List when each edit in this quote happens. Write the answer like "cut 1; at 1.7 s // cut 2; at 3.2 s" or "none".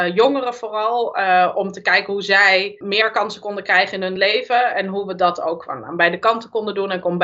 none